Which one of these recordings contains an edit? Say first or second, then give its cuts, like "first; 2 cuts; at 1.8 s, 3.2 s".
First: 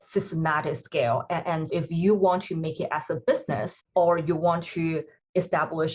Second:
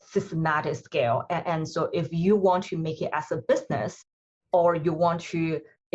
first; 2 cuts; at 1.7 s, 3.8 s